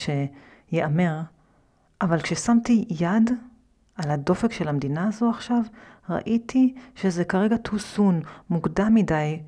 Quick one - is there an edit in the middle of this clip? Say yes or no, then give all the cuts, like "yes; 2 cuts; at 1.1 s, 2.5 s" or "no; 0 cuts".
no; 0 cuts